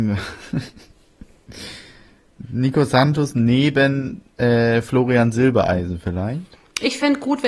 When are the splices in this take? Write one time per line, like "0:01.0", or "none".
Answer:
0:04.3